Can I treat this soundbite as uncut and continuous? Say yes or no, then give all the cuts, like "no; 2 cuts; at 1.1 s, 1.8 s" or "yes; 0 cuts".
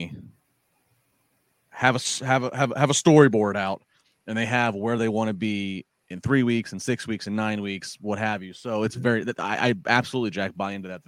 yes; 0 cuts